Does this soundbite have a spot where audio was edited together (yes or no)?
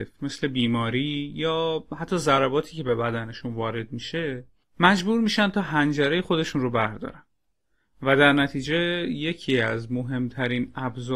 no